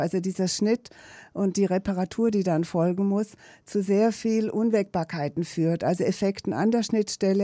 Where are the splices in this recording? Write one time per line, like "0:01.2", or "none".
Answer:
none